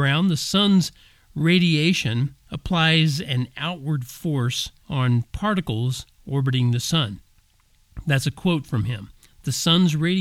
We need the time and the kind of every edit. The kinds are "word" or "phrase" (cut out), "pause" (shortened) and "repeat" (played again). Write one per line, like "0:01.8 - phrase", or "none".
0:02.4 - pause
0:04.8 - pause